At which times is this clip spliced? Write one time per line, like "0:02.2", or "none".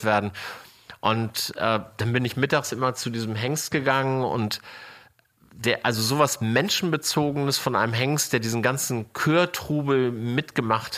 none